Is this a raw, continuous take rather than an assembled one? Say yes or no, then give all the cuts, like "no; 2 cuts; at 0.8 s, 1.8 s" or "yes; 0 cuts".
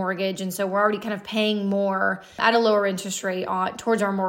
yes; 0 cuts